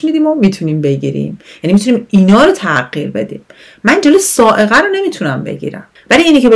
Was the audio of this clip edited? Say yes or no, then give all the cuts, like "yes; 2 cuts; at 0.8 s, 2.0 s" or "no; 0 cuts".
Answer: no; 0 cuts